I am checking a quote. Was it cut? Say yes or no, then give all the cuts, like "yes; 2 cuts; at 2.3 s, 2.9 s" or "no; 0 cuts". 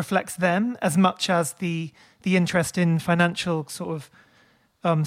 no; 0 cuts